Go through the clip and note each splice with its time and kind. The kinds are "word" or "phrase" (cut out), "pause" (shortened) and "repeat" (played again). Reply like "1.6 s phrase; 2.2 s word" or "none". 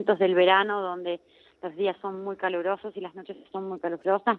none